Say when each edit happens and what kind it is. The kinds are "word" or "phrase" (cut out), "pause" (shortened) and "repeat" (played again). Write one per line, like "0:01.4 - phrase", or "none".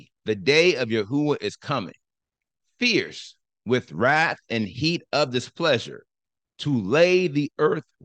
none